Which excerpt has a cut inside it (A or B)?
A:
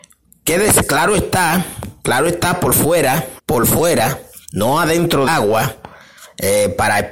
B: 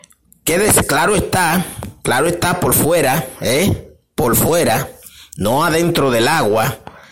A